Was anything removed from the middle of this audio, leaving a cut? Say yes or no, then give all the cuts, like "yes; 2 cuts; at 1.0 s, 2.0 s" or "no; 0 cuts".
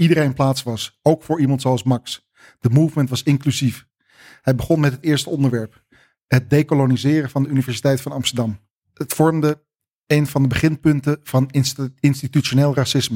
no; 0 cuts